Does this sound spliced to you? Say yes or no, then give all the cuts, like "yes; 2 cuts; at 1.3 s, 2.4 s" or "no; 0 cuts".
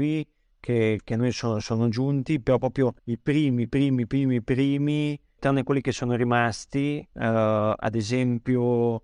yes; 3 cuts; at 3.0 s, 5.4 s, 7.1 s